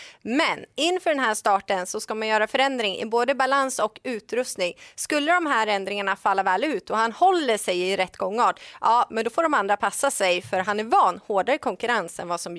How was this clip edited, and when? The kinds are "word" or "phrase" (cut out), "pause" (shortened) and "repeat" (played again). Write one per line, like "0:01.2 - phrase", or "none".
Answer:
none

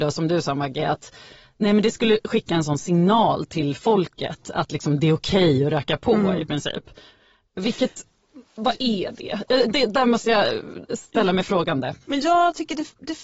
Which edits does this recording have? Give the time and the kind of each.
none

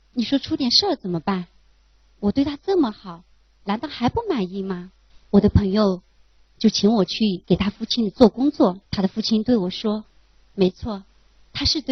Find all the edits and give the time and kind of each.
0:08.9 - pause
0:10.1 - pause

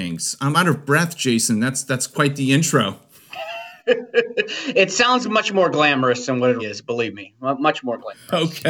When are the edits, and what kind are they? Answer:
0:03.8 - pause
0:06.6 - word

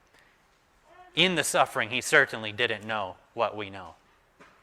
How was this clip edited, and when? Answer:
0:01.1 - pause

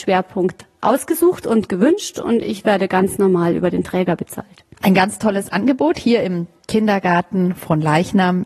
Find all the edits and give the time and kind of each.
0:04.7 - pause

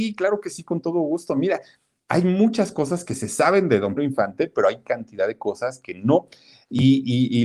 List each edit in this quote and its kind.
0:04.0 - word

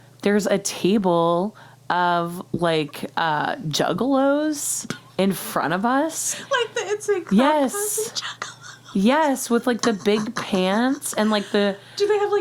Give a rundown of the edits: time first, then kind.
none

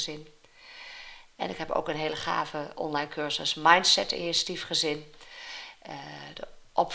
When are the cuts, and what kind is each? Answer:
none

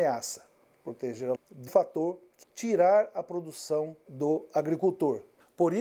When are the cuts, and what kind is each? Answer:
0:01.4 - word
0:01.7 - word
0:02.4 - word
0:04.1 - word

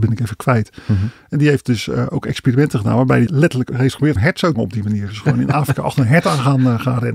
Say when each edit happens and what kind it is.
0:03.3 - word
0:03.7 - word
0:04.2 - word
0:04.5 - phrase

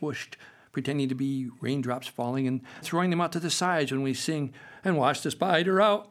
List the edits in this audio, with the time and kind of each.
0:02.8 - word

